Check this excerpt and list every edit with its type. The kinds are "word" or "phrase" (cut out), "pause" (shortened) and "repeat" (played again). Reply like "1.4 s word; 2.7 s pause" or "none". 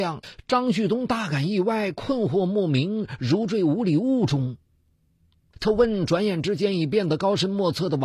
none